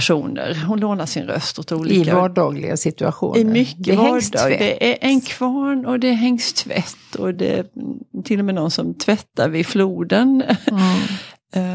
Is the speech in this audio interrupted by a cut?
no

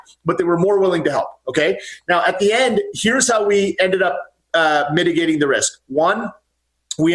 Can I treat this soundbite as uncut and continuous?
yes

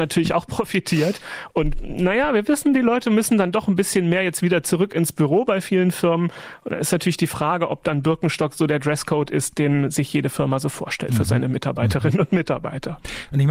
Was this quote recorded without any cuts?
yes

